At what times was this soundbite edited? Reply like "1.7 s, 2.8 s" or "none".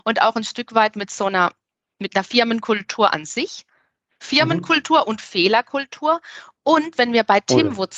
none